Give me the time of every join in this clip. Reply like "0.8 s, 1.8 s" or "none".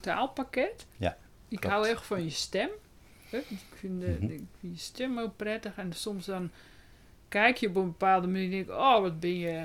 none